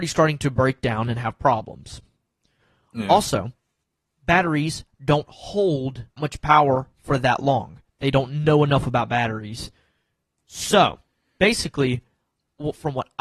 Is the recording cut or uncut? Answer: cut